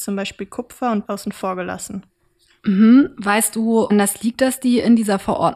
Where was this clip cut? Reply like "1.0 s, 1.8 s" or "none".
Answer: 1.0 s, 3.9 s